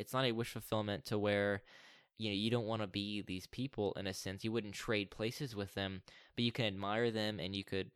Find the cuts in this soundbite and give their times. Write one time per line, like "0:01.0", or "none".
none